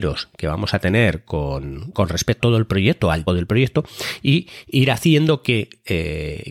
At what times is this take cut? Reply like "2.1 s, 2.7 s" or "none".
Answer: 1.9 s, 2.4 s, 3.3 s